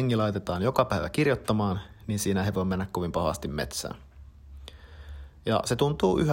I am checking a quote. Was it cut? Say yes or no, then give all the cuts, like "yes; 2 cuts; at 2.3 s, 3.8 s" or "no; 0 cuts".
no; 0 cuts